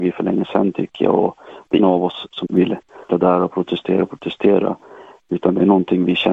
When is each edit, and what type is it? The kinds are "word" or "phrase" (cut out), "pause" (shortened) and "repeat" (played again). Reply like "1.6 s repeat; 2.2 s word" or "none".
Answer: 1.8 s word; 2.4 s word; 3.1 s word; 3.5 s word